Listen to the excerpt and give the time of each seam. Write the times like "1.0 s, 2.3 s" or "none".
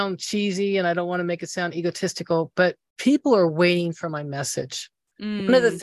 none